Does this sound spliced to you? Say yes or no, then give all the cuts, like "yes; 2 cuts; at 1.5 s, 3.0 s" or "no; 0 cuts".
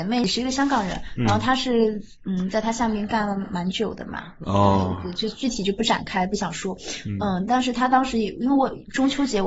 no; 0 cuts